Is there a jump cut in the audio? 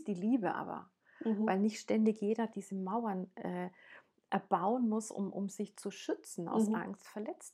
no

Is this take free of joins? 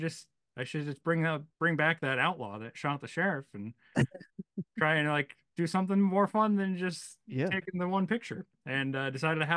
no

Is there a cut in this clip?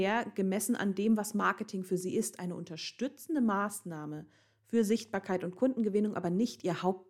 no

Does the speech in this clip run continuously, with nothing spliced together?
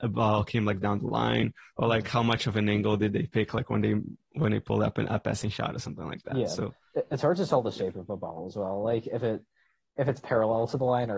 yes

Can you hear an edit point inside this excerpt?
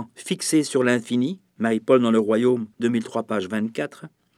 yes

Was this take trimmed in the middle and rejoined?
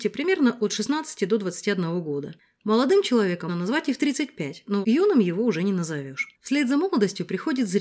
yes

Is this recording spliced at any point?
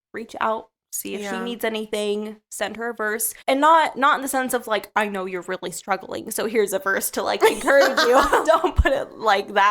yes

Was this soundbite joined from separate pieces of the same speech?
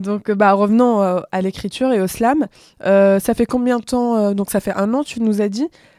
no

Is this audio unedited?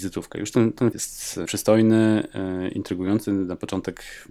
no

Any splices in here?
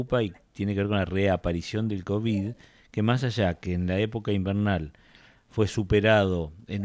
no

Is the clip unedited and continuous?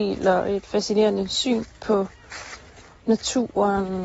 yes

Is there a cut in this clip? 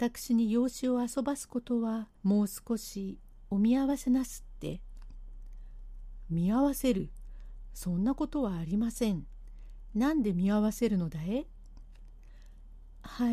yes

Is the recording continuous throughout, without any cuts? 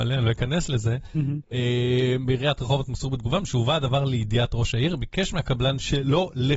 yes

